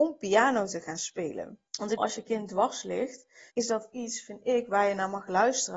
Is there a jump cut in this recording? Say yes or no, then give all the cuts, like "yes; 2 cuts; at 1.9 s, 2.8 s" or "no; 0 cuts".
yes; 3 cuts; at 1.7 s, 2.0 s, 3.5 s